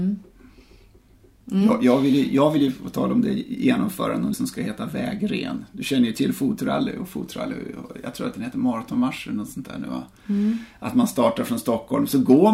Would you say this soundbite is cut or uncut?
cut